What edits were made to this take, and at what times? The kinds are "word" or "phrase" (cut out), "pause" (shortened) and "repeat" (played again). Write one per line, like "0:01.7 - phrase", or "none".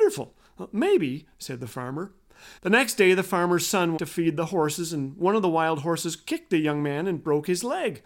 0:02.6 - pause
0:04.0 - phrase